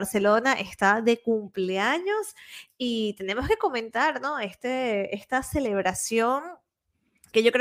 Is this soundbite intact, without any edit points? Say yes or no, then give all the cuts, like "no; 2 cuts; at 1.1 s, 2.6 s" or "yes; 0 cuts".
yes; 0 cuts